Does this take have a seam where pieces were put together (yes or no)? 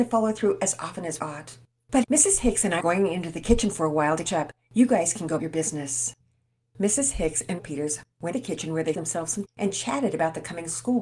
yes